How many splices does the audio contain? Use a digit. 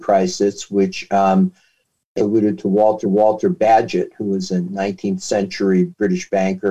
2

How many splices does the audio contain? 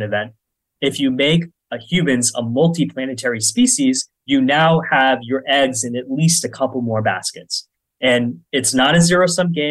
2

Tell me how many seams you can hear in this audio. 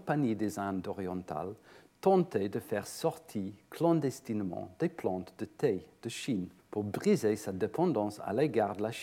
1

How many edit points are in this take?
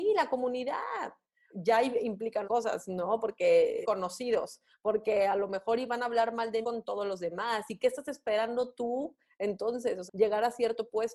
5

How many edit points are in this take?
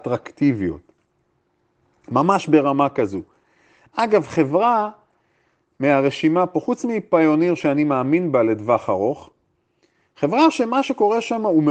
0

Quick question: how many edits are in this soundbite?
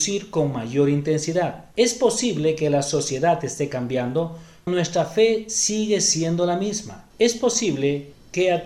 3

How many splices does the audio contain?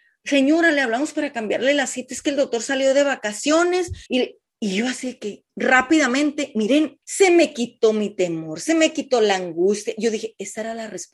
3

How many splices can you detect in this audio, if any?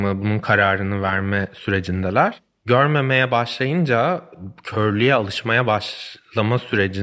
0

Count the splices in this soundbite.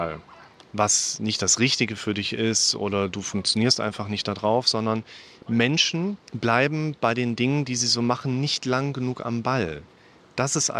1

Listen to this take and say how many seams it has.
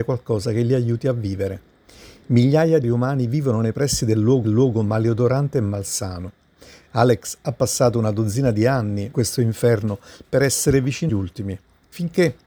4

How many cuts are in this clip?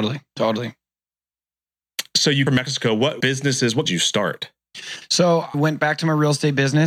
4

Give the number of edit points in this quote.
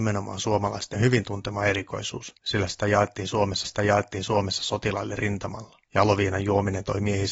4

